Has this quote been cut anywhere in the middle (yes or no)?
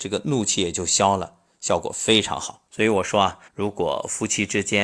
yes